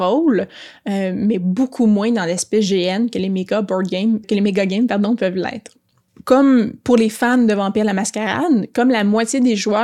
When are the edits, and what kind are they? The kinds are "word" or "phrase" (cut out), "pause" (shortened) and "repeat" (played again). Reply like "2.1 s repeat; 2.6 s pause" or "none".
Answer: 4.2 s word